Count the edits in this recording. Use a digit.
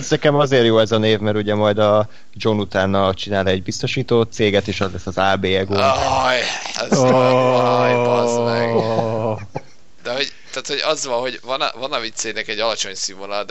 0